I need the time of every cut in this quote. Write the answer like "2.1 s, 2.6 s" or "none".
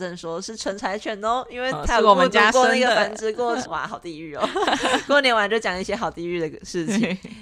3.7 s

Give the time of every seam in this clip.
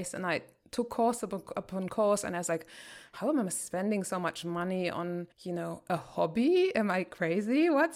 5.3 s

